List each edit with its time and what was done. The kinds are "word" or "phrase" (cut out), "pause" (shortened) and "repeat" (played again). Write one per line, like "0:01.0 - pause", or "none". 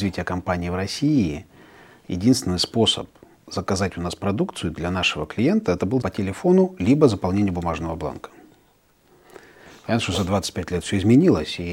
0:06.0 - word

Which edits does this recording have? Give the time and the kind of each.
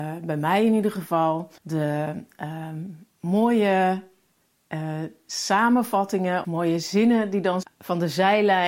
0:01.6 - pause
0:06.4 - word
0:07.6 - word

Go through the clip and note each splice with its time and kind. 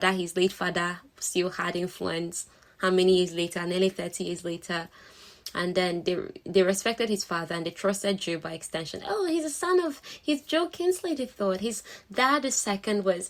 none

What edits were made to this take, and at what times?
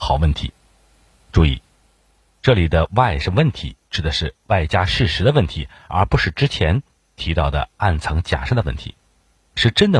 none

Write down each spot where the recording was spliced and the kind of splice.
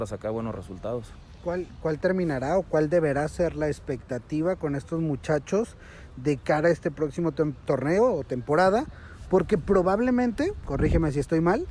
none

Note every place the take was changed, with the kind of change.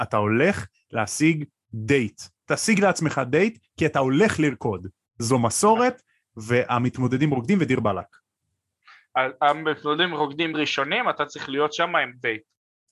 none

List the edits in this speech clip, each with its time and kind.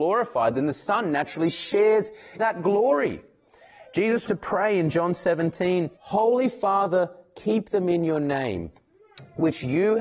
0:02.4 - word
0:04.3 - phrase
0:05.9 - pause

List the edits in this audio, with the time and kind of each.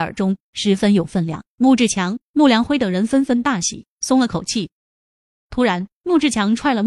none

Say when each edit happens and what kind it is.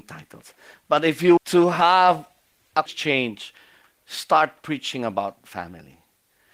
0:01.4 - word
0:02.9 - word

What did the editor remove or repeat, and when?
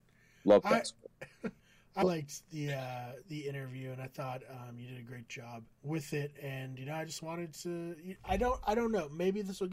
0:01.6 - pause
0:02.0 - word
0:05.7 - pause

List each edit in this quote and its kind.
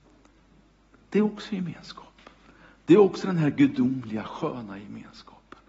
none

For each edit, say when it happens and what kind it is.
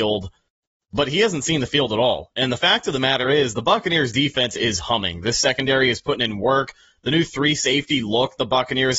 none

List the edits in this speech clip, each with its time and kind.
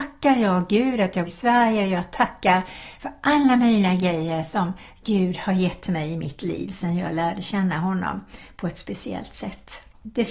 0:01.2 - word

